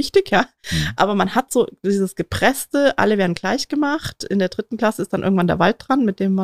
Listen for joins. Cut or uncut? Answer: uncut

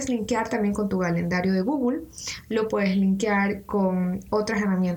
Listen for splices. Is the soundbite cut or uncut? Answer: uncut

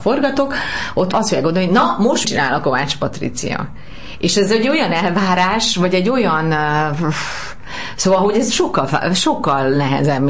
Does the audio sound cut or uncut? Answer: cut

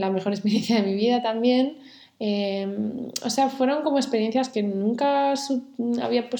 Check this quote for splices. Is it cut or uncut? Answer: uncut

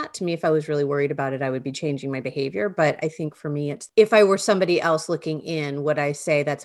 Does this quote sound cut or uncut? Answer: uncut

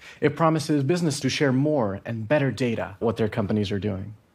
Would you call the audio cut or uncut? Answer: cut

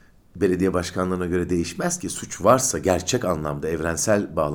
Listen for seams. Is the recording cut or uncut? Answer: uncut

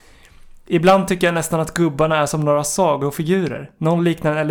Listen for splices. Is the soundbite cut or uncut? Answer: uncut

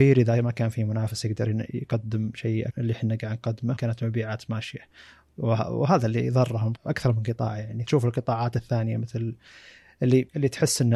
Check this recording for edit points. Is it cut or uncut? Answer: cut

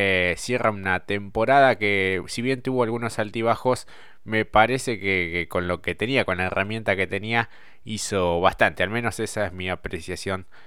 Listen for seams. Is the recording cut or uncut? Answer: uncut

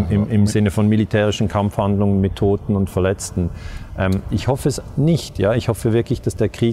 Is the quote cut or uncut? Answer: uncut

